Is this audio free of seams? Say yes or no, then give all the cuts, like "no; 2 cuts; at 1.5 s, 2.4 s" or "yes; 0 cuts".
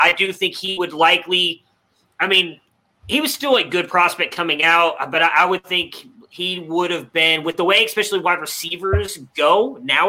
yes; 0 cuts